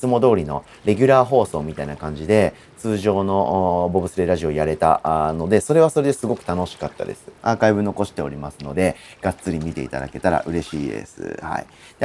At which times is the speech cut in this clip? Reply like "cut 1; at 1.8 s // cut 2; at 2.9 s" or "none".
cut 1; at 7.4 s